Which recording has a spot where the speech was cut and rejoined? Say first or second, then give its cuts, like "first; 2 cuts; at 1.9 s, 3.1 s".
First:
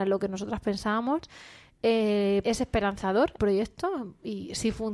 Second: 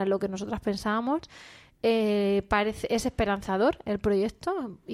first; 2 cuts; at 2.4 s, 3.4 s